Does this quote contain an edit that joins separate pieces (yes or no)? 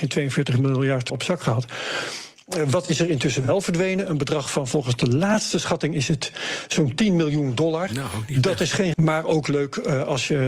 yes